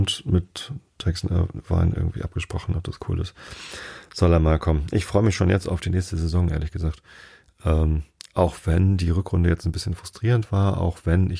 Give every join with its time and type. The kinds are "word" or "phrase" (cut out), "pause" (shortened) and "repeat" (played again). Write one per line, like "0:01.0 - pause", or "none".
none